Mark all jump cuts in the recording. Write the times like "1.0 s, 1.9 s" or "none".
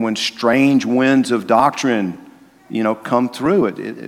none